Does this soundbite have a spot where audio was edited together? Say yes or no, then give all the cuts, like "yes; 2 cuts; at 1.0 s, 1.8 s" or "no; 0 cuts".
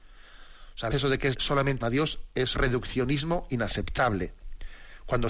yes; 4 cuts; at 0.9 s, 1.3 s, 1.8 s, 2.5 s